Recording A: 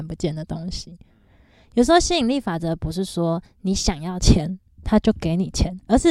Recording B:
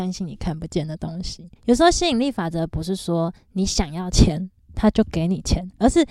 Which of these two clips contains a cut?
B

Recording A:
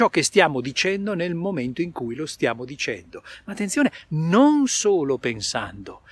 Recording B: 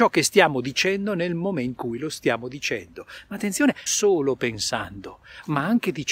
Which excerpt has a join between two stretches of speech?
B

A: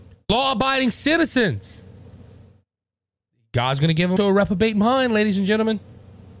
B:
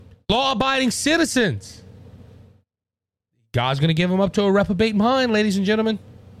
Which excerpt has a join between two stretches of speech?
A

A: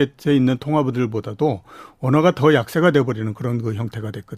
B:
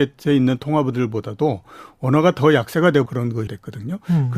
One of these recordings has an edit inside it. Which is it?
B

